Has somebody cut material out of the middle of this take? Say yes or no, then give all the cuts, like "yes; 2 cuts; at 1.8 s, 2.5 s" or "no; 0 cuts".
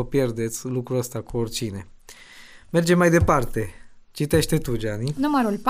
no; 0 cuts